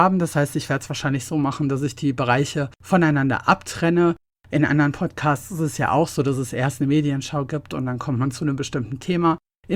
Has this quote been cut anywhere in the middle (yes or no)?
no